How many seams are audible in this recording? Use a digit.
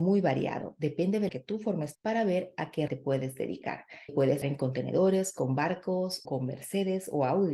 6